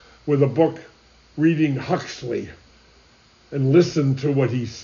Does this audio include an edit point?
no; 0 cuts

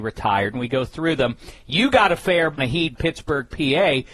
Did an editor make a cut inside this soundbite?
yes; 2 cuts; at 2.6 s, 2.9 s

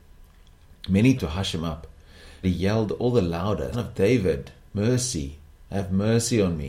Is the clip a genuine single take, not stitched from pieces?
no; 3 cuts; at 1.2 s, 2.4 s, 3.7 s

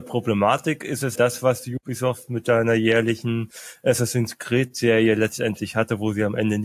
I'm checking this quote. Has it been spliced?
yes; 1 cut; at 1.2 s

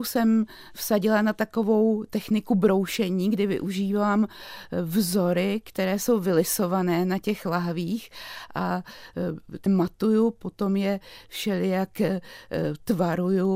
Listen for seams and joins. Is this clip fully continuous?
no; 1 cut; at 9.7 s

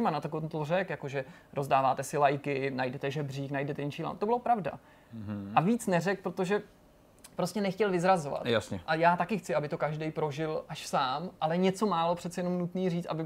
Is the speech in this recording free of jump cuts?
yes; 0 cuts

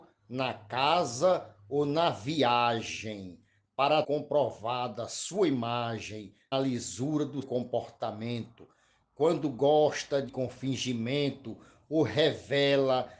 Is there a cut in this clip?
yes; 4 cuts; at 4.0 s, 6.5 s, 7.4 s, 10.3 s

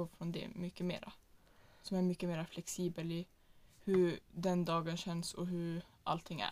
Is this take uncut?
no; 1 cut; at 4.2 s

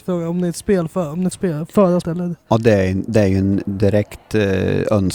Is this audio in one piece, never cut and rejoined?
no; 2 cuts; at 1.3 s, 2.0 s

